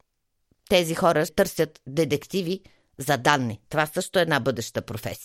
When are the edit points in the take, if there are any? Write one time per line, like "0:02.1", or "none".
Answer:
0:01.3